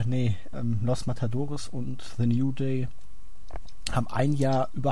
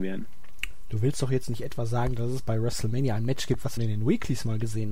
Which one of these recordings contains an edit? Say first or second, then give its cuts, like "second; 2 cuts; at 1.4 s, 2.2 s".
second; 1 cut; at 3.8 s